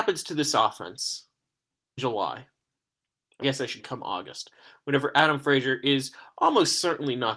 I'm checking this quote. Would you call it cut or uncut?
cut